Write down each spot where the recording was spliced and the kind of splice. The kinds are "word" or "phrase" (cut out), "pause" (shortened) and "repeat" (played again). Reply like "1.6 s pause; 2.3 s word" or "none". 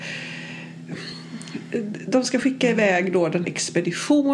3.4 s word